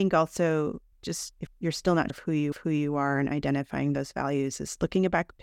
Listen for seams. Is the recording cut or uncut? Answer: cut